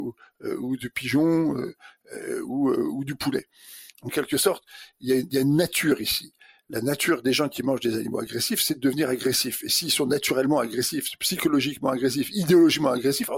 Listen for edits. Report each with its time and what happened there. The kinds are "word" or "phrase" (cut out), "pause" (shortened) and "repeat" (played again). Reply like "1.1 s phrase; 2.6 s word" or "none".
none